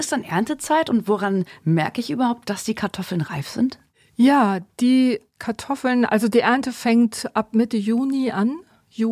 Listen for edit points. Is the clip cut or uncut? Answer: uncut